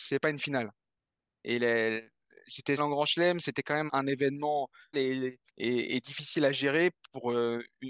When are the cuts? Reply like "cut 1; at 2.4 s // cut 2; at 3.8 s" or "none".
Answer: cut 1; at 2.8 s // cut 2; at 3.9 s // cut 3; at 4.9 s // cut 4; at 5.5 s